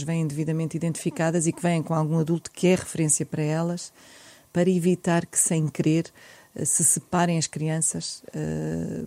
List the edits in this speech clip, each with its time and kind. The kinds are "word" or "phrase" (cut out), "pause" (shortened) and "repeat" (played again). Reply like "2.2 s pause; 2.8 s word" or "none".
none